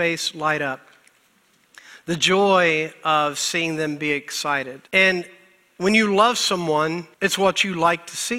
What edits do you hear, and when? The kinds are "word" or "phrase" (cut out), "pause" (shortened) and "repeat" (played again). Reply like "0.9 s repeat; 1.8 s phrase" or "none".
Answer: 4.9 s pause; 7.1 s pause